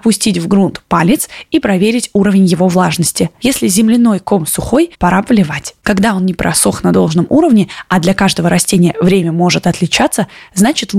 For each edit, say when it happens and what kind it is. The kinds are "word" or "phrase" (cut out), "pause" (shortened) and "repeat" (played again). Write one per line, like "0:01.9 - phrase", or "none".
0:04.9 - pause